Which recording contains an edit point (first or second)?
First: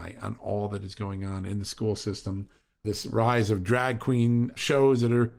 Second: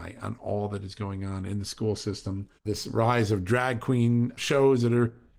second